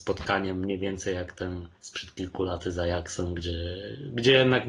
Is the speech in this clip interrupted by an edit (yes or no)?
yes